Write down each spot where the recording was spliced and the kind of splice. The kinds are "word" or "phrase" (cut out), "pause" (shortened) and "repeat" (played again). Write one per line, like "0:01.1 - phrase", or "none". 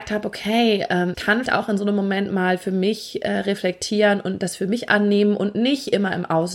0:01.1 - word
0:01.5 - word